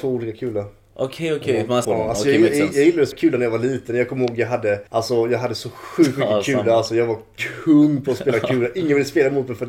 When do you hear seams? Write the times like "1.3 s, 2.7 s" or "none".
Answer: 1.8 s, 3.1 s, 4.9 s